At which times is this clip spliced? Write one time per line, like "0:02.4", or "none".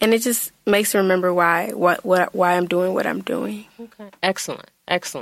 none